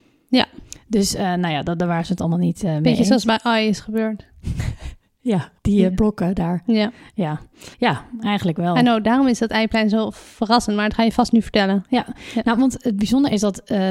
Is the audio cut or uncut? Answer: cut